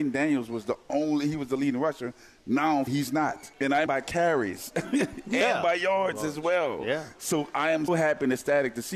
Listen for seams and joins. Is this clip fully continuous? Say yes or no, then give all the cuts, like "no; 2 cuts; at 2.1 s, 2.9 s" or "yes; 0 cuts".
no; 4 cuts; at 2.9 s, 3.5 s, 3.9 s, 7.9 s